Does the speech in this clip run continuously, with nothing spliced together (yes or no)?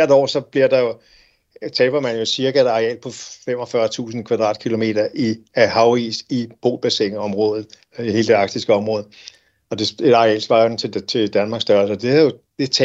yes